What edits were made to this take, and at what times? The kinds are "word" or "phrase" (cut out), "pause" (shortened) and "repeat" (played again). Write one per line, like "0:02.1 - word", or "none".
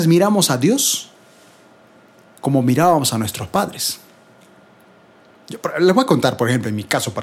none

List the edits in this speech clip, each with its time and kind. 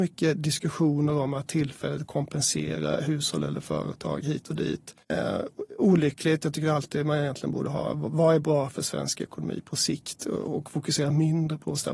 0:05.0 - pause

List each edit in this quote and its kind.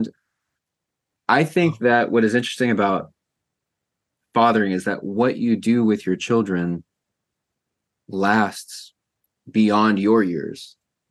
none

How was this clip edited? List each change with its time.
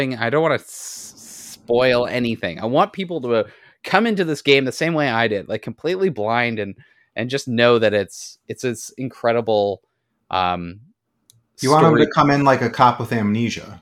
none

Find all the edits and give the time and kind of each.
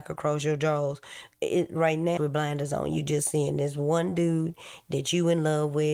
0:01.3 - pause
0:02.2 - phrase

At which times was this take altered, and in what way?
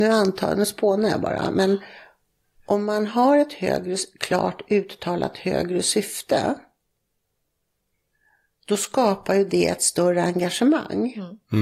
none

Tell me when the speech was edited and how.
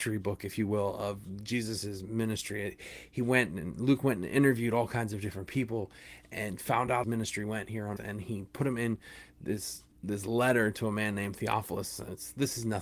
0:07.0 - phrase
0:08.0 - word
0:09.9 - pause

